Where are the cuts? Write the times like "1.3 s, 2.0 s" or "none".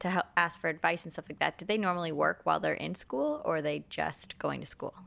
none